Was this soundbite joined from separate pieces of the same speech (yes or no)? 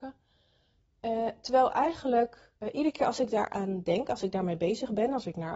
yes